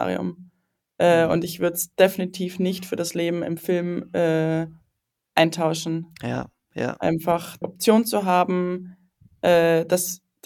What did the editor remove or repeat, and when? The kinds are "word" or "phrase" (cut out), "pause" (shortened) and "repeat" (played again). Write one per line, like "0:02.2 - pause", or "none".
0:07.6 - word